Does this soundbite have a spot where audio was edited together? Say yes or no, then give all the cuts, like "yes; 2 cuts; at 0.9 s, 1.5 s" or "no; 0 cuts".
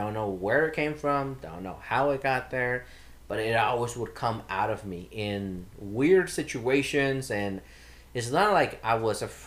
no; 0 cuts